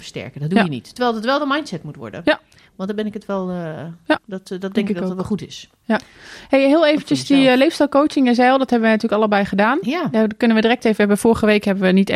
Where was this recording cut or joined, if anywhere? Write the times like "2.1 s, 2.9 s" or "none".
4.2 s

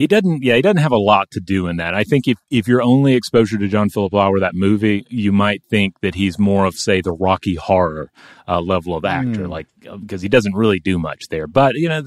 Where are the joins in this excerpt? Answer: none

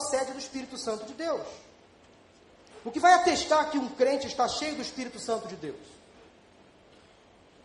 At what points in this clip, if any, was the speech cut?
none

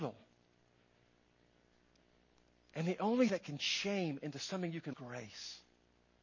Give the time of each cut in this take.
3.3 s, 3.6 s, 4.9 s

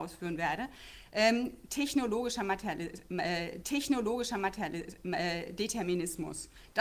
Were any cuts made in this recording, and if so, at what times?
3.6 s

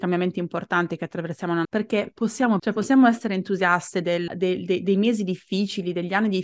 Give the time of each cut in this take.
1.6 s, 2.6 s, 4.3 s

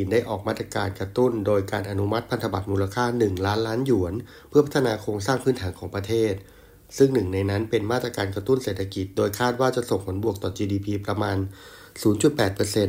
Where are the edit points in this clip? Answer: none

